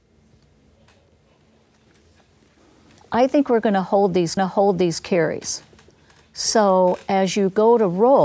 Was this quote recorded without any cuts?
no; 1 cut; at 4.4 s

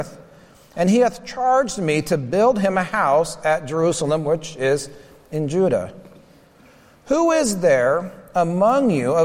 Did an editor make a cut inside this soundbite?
no; 0 cuts

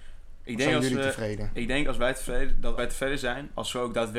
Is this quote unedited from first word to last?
no; 1 cut; at 2.8 s

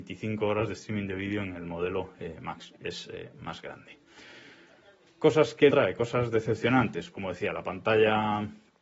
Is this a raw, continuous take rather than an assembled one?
no; 3 cuts; at 2.8 s, 5.7 s, 7.1 s

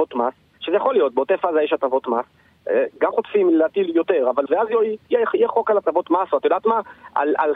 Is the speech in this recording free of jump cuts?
no; 2 cuts; at 3.1 s, 4.5 s

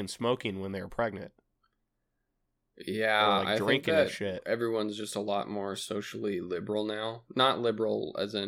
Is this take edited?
no; 0 cuts

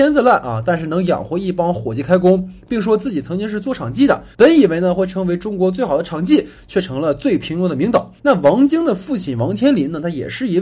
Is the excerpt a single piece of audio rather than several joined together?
no; 2 cuts; at 4.3 s, 8.2 s

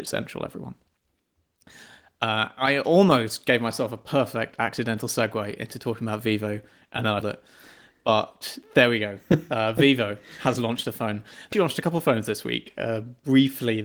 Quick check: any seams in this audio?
yes; 2 cuts; at 7.2 s, 11.5 s

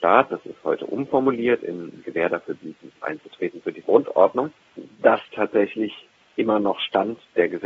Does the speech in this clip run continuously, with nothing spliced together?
no; 4 cuts; at 2.0 s, 3.0 s, 3.8 s, 5.3 s

